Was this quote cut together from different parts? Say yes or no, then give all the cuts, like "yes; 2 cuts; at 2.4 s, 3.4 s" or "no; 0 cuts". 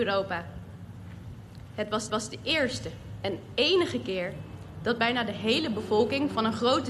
yes; 1 cut; at 2.1 s